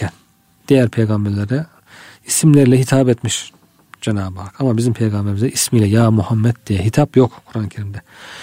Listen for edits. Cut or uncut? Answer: uncut